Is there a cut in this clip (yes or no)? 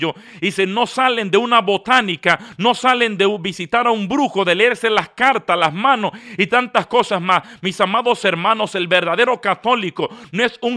no